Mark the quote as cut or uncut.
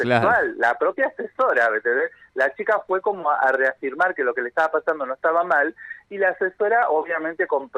uncut